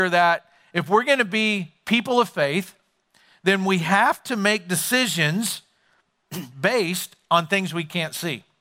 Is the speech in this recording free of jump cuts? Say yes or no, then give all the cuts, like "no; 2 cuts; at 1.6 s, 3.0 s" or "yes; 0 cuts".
yes; 0 cuts